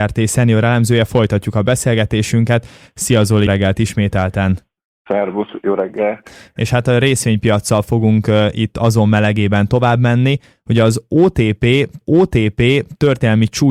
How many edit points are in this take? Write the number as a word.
two